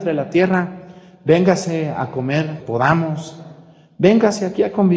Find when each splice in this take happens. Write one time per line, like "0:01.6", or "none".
0:02.6

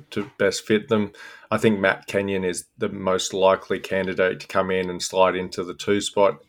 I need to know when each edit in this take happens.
none

